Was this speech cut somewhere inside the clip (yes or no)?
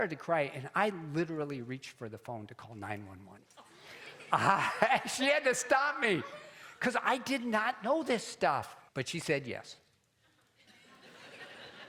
yes